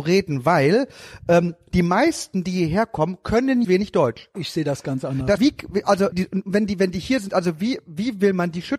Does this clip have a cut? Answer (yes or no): yes